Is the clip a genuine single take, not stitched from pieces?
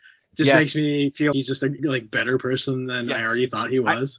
no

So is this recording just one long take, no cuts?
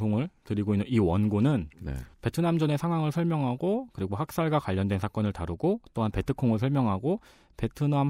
no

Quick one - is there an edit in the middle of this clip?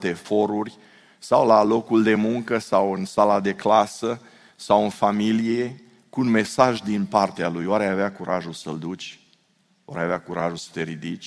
no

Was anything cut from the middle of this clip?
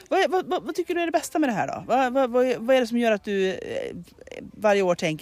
no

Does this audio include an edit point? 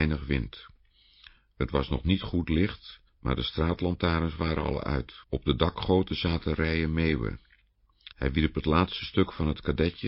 yes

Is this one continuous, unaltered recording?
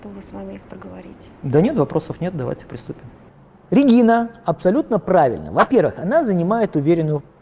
no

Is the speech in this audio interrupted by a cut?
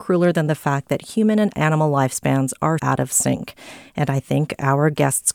yes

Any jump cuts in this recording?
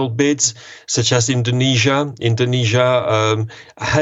no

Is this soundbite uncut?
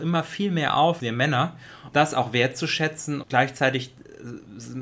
no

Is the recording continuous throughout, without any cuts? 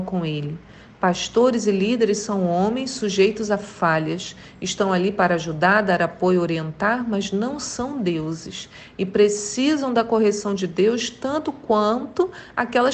yes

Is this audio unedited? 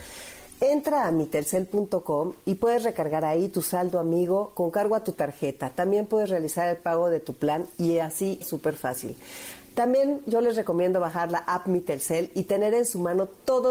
no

